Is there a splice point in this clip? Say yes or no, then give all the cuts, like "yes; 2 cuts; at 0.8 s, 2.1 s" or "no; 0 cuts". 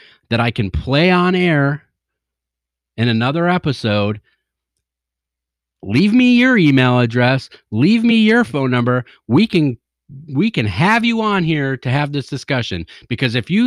no; 0 cuts